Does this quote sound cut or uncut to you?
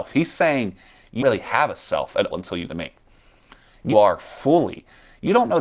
cut